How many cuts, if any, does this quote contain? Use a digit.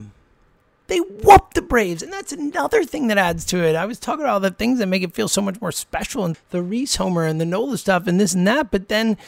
1